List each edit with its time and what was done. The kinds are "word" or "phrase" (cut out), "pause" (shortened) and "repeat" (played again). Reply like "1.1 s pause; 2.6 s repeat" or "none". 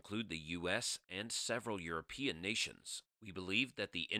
3.1 s pause